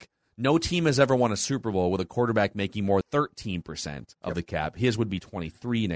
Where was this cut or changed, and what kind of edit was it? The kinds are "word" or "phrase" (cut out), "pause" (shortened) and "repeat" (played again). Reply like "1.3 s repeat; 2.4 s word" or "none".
3.0 s word; 4.1 s pause